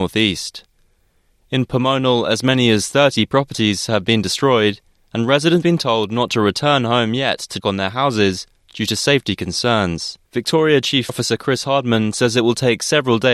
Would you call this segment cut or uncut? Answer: cut